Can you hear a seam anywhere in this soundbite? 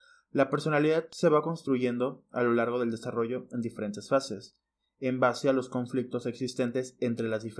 no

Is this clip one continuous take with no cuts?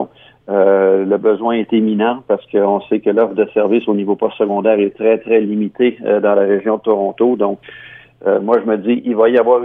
yes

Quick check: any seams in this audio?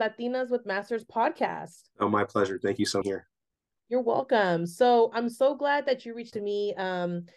yes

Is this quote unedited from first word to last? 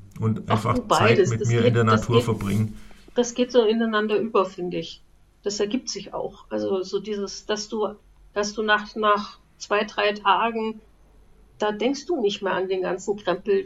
yes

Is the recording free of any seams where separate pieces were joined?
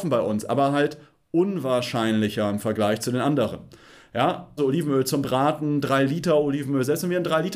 no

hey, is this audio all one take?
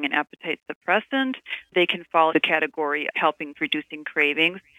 no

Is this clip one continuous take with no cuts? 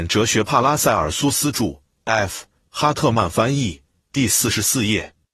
yes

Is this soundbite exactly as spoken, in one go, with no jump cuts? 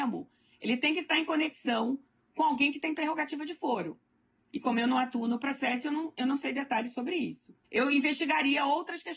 yes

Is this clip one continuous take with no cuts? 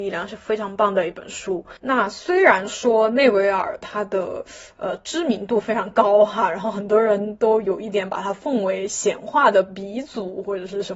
no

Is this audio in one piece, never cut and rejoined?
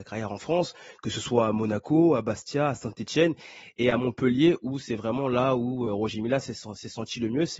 yes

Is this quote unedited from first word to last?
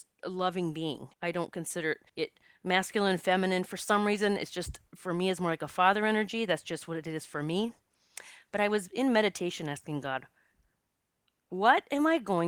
no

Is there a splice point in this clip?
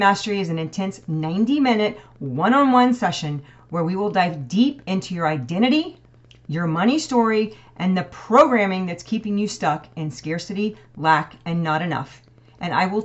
no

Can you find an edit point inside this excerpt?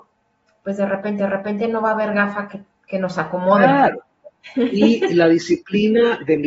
yes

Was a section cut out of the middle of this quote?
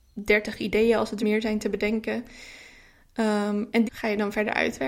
yes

